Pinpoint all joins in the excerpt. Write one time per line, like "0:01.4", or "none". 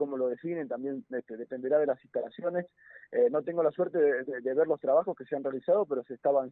none